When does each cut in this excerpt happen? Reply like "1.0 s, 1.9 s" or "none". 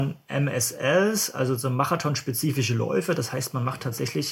none